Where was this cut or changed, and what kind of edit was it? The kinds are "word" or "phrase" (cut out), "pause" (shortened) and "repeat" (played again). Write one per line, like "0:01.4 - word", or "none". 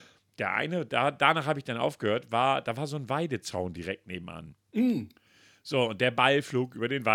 0:04.6 - pause